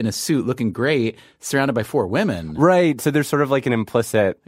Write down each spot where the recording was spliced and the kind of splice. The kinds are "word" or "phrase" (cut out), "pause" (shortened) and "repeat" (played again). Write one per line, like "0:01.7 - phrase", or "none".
none